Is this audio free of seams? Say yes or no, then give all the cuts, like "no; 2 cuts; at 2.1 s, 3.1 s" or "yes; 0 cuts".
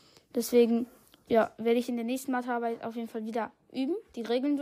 yes; 0 cuts